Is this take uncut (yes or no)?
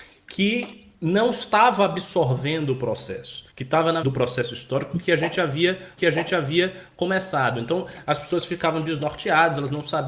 no